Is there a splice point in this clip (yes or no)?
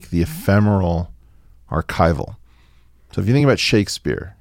no